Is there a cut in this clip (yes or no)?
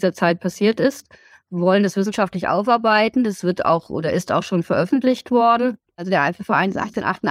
no